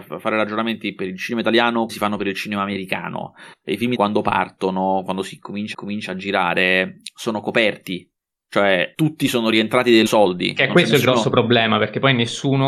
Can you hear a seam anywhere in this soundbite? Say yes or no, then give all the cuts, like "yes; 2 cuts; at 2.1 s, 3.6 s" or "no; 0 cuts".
yes; 5 cuts; at 1.9 s, 4.0 s, 5.7 s, 8.9 s, 10.1 s